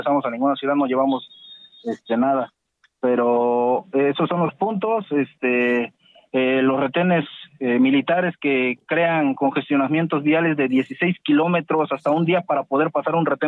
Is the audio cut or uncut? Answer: uncut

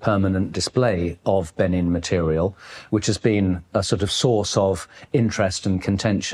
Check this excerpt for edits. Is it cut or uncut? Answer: uncut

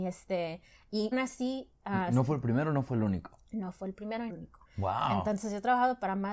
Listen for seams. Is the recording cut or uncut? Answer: cut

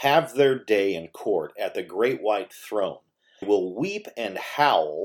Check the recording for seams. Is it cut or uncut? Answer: cut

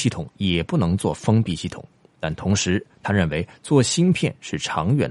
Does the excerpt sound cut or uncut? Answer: uncut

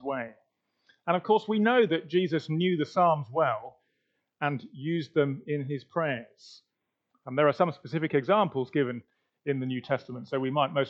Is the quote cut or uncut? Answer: uncut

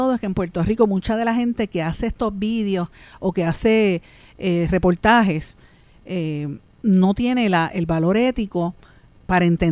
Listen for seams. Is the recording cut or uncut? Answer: uncut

